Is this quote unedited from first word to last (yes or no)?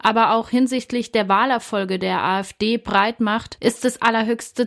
yes